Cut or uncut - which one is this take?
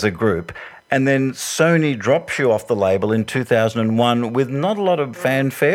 uncut